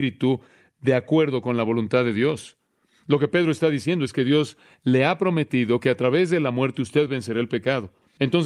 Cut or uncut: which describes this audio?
uncut